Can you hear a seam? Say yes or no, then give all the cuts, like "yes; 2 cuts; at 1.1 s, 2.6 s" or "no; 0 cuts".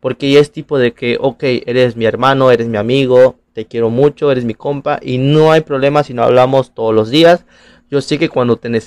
no; 0 cuts